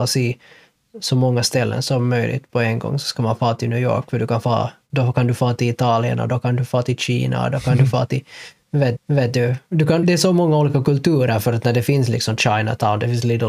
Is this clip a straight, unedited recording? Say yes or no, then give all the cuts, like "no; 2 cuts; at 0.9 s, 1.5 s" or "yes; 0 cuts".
no; 2 cuts; at 9.0 s, 10.0 s